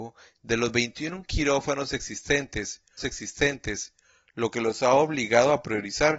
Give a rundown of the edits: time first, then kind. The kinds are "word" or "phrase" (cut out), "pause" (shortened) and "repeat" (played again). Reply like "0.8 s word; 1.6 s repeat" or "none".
3.0 s repeat